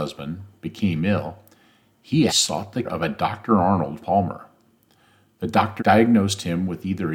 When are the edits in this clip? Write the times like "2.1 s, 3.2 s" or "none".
2.3 s, 2.8 s, 4.0 s, 5.8 s